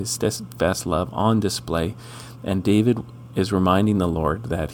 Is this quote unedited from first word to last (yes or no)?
yes